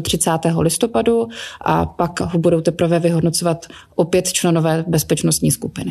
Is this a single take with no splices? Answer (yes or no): yes